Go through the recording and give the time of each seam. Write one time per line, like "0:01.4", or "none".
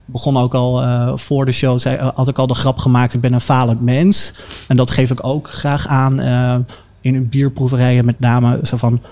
none